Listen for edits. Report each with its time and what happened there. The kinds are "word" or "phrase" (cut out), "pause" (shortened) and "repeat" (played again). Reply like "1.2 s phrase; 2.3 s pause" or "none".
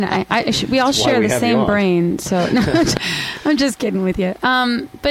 none